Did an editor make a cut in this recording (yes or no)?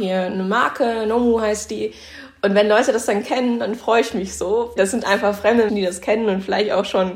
yes